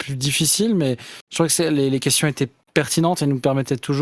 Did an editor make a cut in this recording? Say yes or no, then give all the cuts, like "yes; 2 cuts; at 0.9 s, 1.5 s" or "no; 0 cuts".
no; 0 cuts